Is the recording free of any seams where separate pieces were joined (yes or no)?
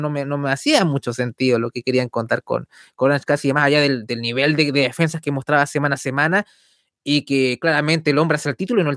yes